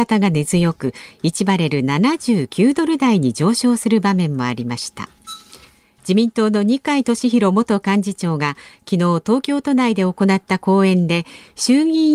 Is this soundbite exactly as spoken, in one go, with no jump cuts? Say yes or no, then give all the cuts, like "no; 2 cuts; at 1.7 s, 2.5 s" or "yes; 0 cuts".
no; 1 cut; at 5.7 s